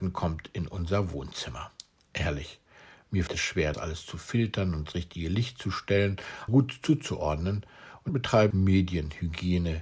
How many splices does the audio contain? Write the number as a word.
six